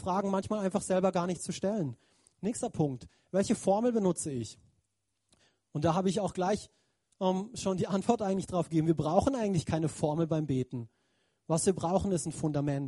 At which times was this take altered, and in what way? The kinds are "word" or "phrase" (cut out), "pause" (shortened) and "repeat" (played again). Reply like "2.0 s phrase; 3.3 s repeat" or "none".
none